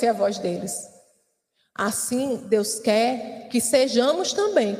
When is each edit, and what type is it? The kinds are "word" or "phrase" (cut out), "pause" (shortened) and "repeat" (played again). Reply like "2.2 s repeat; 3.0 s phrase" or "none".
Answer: none